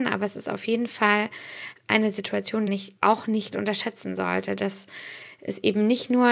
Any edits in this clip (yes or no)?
yes